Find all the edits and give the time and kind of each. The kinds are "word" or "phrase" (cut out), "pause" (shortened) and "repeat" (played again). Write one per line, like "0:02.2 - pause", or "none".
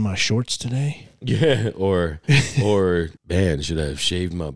0:02.2 - pause
0:03.2 - pause